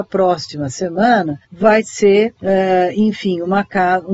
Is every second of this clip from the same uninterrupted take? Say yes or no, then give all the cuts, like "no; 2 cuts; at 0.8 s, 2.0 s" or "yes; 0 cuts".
no; 2 cuts; at 1.4 s, 2.4 s